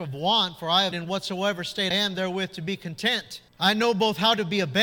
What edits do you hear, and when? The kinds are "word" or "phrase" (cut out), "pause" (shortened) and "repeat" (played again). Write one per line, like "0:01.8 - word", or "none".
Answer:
0:00.9 - word
0:01.9 - word
0:03.5 - pause

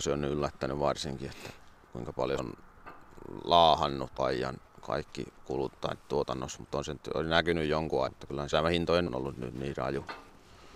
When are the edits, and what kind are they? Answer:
0:02.4 - word
0:04.2 - word
0:08.1 - word
0:08.5 - word
0:09.1 - word

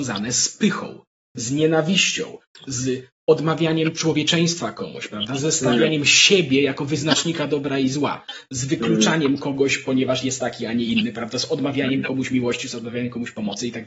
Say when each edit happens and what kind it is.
none

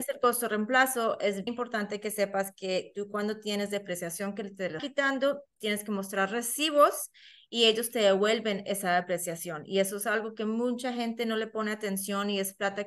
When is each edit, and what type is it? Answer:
0:01.5 - word
0:04.8 - word

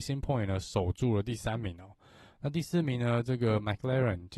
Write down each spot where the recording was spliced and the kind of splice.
none

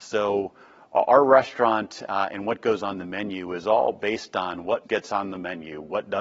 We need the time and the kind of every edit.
0:04.8 - word

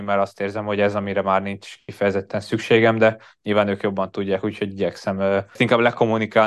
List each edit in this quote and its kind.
none

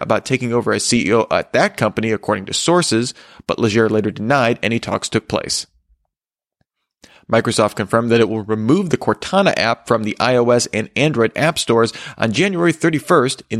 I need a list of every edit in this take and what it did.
none

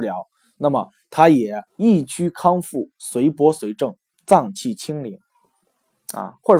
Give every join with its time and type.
0:01.7 - pause

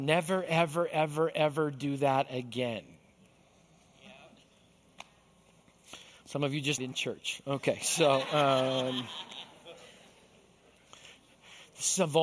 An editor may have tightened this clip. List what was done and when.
0:06.8 - word

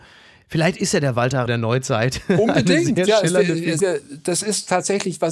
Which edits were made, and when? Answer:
0:01.5 - word
0:03.8 - word

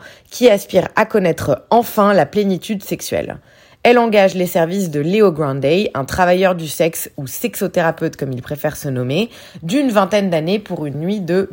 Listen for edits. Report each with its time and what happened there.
none

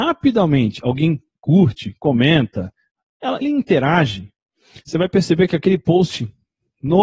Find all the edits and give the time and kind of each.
0:03.4 - word

